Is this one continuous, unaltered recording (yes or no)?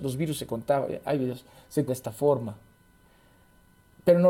no